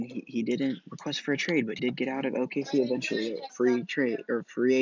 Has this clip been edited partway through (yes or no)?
yes